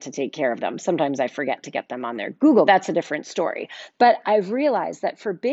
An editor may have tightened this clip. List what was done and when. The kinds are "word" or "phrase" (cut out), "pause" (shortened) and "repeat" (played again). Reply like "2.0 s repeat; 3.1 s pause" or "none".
2.7 s phrase